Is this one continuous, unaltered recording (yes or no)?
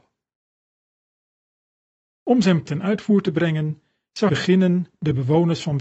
no